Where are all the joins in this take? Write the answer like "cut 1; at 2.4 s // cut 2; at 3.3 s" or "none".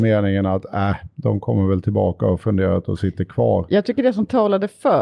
none